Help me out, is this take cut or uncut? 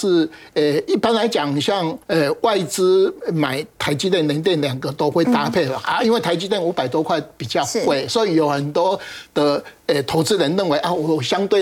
cut